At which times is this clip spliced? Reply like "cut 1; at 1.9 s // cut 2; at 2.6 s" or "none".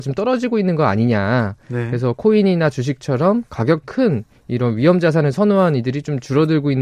cut 1; at 3.8 s